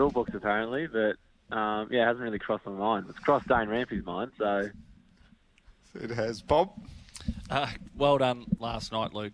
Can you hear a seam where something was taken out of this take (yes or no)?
no